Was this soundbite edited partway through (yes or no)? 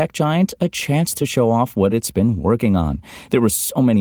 no